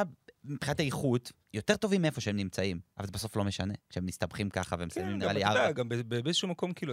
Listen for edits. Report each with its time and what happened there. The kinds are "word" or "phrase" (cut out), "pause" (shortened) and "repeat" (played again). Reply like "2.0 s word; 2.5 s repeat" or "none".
1.4 s pause; 2.9 s pause; 3.8 s pause; 5.7 s word